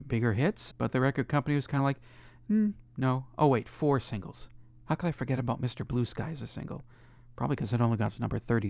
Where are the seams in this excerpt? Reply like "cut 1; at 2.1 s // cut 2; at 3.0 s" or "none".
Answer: none